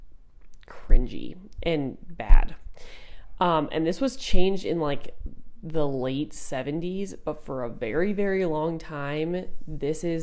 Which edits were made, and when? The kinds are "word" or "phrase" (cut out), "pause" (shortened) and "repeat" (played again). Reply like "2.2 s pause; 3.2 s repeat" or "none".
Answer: none